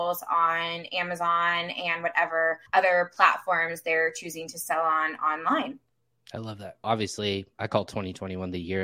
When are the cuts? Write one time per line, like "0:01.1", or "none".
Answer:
0:02.7
0:06.8